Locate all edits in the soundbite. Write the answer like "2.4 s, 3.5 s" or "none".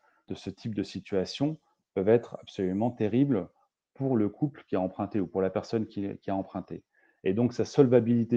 none

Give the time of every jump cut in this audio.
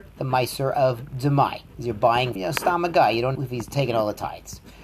1.7 s, 2.4 s, 3.4 s

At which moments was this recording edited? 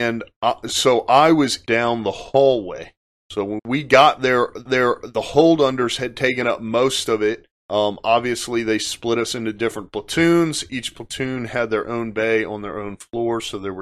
1.7 s, 3.1 s, 3.6 s, 4.7 s, 7.6 s

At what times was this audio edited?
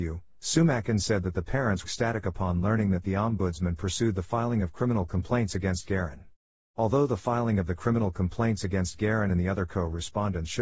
1.8 s

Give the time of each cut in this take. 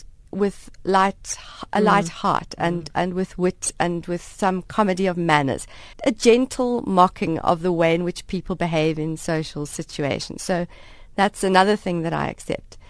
5.9 s

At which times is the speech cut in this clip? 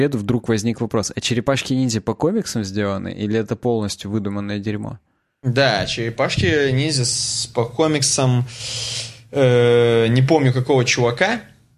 none

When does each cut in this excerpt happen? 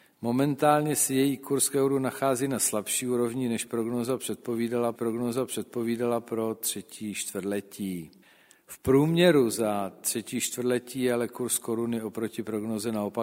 4.9 s, 8.2 s

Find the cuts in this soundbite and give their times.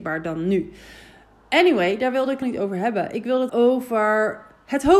2.4 s, 3.5 s

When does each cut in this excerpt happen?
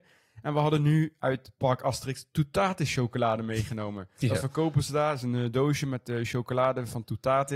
none

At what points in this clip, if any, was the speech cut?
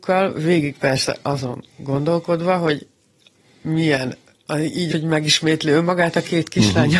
4.9 s

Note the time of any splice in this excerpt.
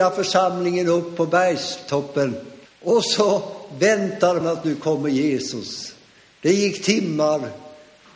2.7 s, 4.4 s

